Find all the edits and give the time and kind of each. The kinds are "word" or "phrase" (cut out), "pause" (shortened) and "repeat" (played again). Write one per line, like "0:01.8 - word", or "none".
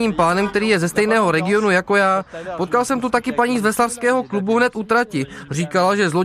none